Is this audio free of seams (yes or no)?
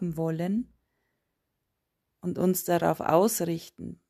yes